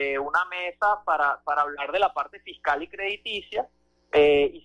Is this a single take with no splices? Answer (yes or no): yes